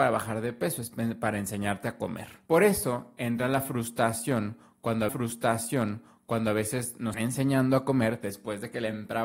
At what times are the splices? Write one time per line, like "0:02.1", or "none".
0:05.1
0:07.1